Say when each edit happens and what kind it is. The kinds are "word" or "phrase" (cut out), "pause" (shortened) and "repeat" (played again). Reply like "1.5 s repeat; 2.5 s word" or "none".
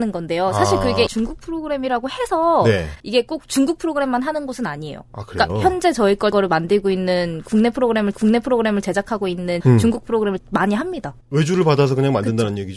1.1 s word; 3.0 s pause; 6.3 s word; 8.1 s repeat; 9.6 s word; 10.4 s word; 11.2 s pause